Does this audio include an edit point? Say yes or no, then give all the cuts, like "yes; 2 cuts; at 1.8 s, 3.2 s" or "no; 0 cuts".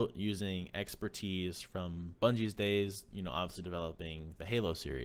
no; 0 cuts